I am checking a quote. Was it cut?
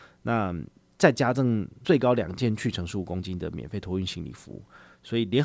no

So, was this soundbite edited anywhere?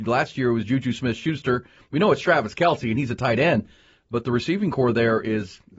no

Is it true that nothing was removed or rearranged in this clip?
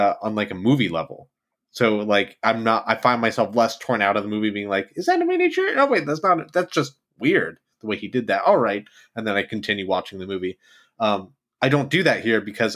yes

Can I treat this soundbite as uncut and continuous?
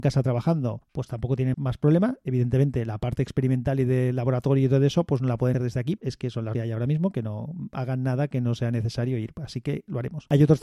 no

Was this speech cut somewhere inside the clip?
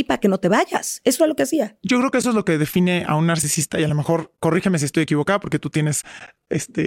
no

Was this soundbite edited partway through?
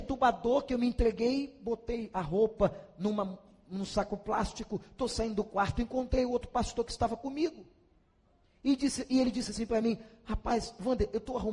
no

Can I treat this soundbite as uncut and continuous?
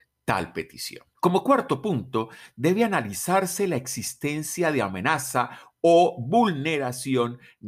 no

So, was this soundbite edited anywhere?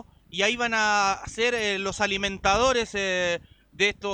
no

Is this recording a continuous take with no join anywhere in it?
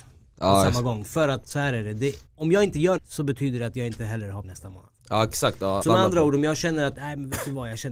no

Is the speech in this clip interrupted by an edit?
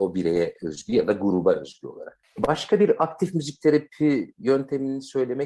no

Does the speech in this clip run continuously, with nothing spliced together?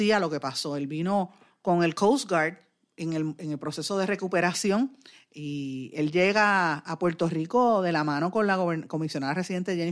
yes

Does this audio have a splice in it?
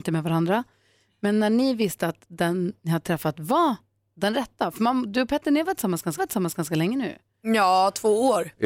yes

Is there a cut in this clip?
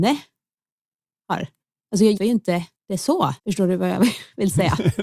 yes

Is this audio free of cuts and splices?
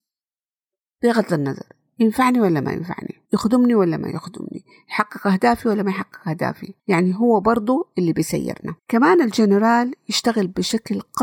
no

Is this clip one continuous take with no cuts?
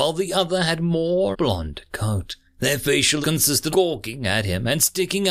no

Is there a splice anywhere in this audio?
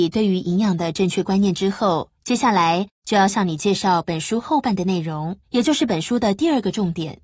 yes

